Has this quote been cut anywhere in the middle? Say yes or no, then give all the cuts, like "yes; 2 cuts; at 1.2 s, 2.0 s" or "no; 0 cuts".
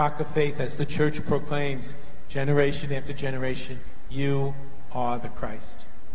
no; 0 cuts